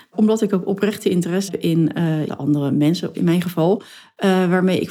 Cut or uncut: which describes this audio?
cut